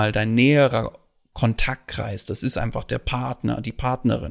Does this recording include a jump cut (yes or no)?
no